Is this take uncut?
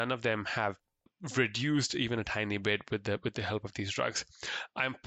yes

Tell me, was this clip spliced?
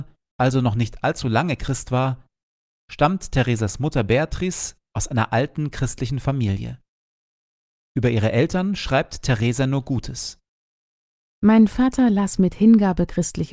no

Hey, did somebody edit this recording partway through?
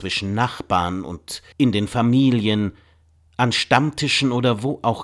yes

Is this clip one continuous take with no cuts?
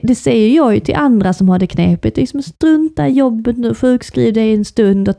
yes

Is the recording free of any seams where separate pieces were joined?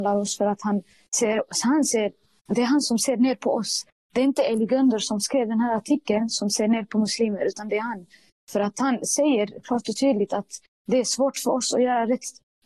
yes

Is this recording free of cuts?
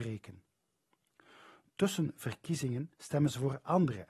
no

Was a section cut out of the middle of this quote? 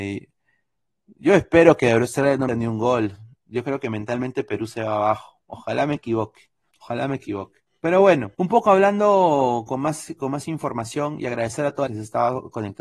yes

